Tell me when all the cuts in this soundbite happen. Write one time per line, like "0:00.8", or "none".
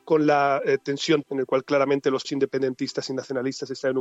0:01.2
0:02.2